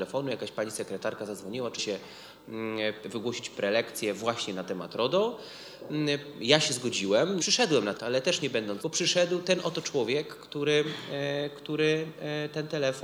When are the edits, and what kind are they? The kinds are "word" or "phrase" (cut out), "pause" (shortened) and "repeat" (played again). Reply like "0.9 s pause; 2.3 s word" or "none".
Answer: 1.8 s word; 7.4 s phrase; 7.9 s phrase; 8.8 s word